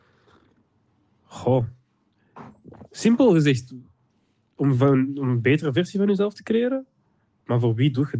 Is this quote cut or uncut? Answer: uncut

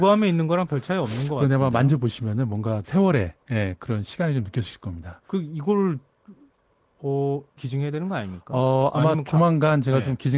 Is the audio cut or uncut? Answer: cut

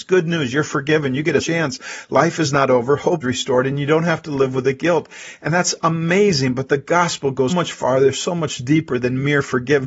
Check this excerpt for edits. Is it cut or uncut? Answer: cut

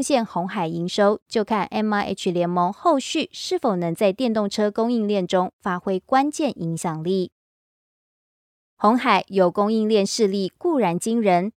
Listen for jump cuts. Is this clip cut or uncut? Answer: uncut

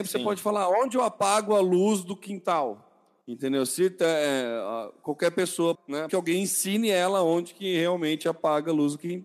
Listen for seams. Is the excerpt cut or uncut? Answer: cut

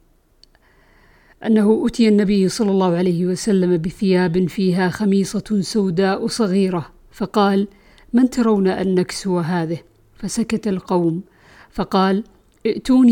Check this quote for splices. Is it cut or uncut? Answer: uncut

